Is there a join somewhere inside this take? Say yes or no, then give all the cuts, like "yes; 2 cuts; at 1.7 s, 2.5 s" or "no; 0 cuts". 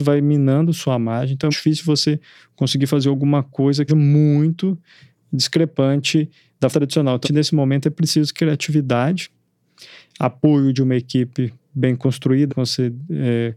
yes; 5 cuts; at 1.5 s, 3.9 s, 6.7 s, 7.2 s, 12.5 s